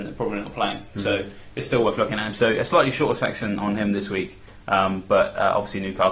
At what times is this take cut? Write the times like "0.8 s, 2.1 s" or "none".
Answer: none

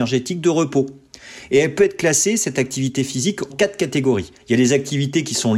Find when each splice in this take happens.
3.5 s, 4.4 s

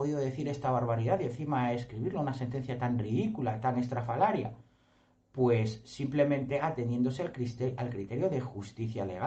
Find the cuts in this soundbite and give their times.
none

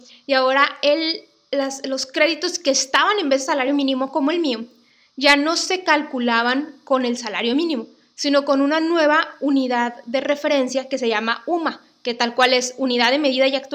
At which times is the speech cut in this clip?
none

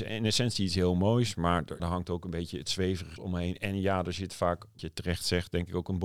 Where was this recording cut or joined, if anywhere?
1.8 s, 3.2 s, 4.8 s

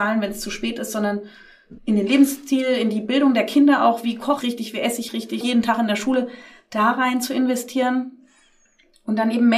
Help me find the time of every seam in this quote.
1.8 s, 4.4 s, 5.4 s

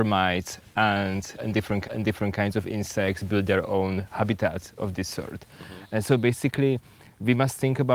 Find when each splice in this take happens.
1.8 s

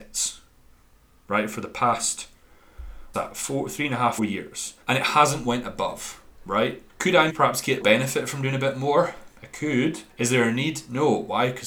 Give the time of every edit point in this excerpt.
3.1 s, 4.2 s, 4.8 s, 6.9 s, 7.3 s, 7.8 s, 10.1 s

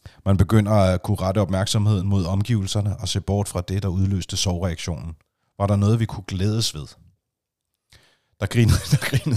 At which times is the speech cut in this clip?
none

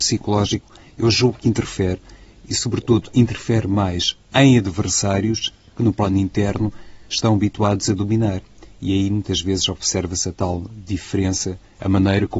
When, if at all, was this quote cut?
none

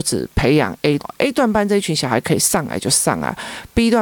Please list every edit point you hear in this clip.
1.0 s

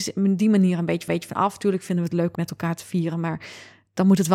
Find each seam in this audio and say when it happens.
1.1 s, 2.3 s

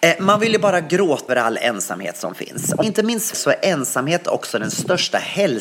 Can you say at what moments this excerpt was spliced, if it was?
1.3 s, 2.8 s, 3.3 s

